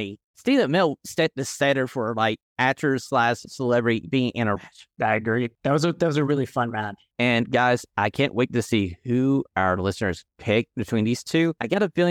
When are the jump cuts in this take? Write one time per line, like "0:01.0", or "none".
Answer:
0:04.5